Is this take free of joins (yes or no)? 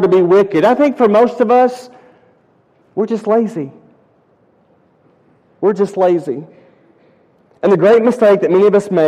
yes